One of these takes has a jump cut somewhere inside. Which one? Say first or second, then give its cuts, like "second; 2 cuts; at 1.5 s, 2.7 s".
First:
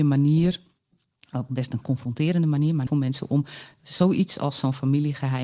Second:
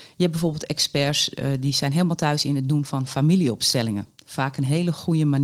first; 1 cut; at 2.9 s